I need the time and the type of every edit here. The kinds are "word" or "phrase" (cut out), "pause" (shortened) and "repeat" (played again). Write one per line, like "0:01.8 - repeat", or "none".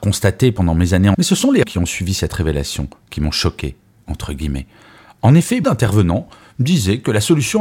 0:01.1 - word
0:01.6 - word
0:05.6 - word